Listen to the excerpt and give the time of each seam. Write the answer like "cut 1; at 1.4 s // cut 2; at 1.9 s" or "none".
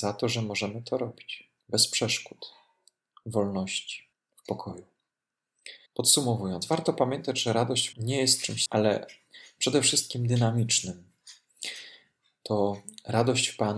cut 1; at 1.6 s // cut 2; at 4.1 s // cut 3; at 5.9 s // cut 4; at 7.9 s // cut 5; at 8.7 s